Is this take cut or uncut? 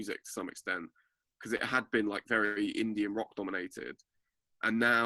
uncut